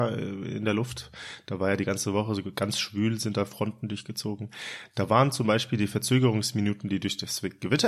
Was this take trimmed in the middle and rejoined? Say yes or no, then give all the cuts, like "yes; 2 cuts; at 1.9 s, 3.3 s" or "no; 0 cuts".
no; 0 cuts